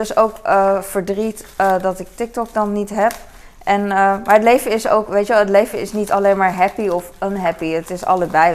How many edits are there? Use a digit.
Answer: 0